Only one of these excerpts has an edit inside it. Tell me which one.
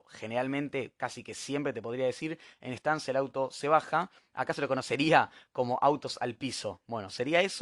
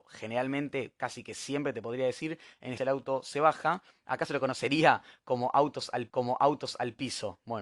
second; 2 cuts; at 2.8 s, 6.1 s

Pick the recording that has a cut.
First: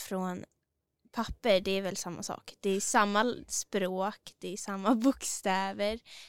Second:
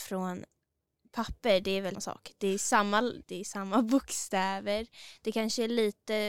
second; 2 cuts; at 1.9 s, 3.2 s

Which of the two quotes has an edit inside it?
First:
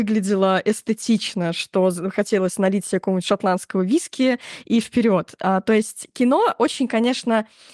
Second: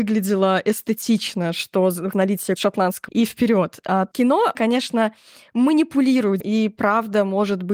second; 6 cuts; at 2.1 s, 2.6 s, 3.1 s, 4.1 s, 4.5 s, 6.4 s

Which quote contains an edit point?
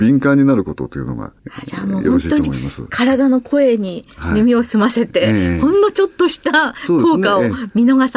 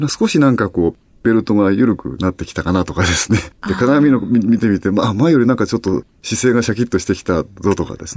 second; 1 cut; at 3.6 s

